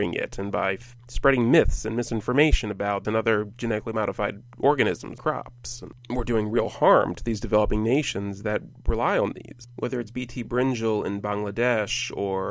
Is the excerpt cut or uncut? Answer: cut